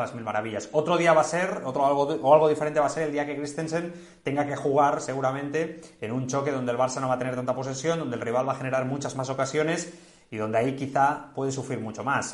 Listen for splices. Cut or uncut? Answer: uncut